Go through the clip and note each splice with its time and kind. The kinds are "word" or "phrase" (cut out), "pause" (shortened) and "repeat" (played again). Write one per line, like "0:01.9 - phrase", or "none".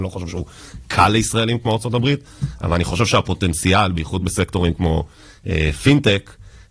none